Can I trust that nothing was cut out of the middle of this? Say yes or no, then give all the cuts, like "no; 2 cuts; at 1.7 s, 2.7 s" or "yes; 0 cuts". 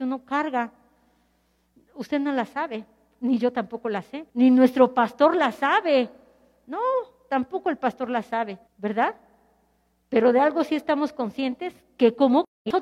no; 2 cuts; at 4.3 s, 8.7 s